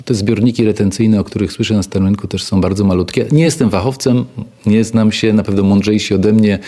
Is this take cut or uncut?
uncut